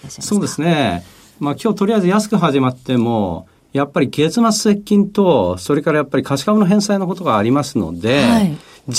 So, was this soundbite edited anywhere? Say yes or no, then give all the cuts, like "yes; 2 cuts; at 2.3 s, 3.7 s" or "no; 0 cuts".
no; 0 cuts